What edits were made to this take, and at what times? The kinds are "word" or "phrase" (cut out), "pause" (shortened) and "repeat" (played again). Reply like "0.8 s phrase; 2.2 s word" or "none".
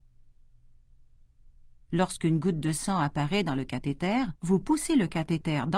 4.4 s pause